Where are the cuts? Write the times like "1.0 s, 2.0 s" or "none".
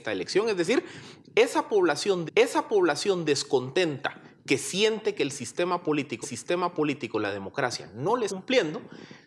2.3 s, 6.2 s, 8.3 s